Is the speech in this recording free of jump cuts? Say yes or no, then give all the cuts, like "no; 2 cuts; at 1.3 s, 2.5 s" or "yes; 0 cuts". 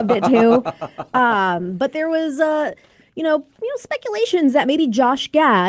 yes; 0 cuts